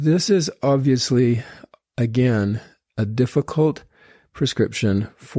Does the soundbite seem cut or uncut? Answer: uncut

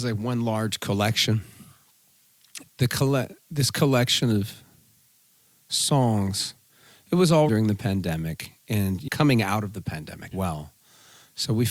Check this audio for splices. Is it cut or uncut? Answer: cut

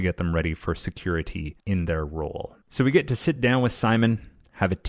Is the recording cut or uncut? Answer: uncut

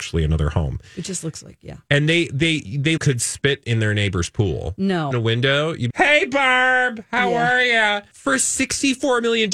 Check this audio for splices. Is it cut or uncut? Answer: cut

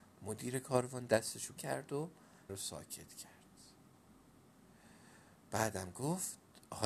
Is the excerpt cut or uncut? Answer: cut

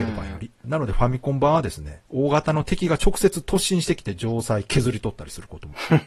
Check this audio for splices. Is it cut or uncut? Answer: cut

